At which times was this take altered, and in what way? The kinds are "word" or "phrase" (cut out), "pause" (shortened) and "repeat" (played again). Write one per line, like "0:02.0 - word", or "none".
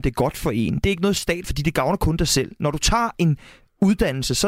0:01.4 - word